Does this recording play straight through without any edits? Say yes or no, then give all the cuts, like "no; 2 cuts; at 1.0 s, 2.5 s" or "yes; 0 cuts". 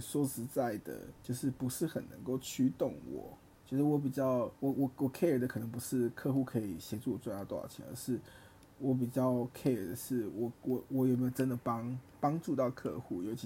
no; 3 cuts; at 1.2 s, 3.5 s, 4.6 s